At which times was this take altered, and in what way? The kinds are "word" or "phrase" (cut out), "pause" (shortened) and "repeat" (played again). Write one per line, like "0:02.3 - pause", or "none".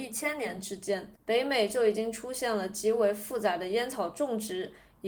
0:01.2 - pause